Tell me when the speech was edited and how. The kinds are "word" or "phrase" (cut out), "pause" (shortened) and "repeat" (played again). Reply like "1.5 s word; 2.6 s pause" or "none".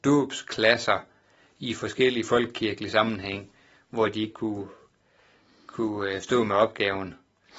4.3 s phrase